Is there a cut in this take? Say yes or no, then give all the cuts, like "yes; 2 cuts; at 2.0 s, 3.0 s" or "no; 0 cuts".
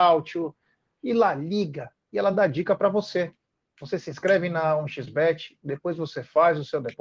no; 0 cuts